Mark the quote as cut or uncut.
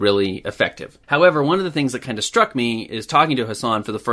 cut